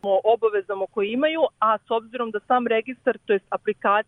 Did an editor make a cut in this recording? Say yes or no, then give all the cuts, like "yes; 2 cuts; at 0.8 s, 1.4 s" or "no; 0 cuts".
no; 0 cuts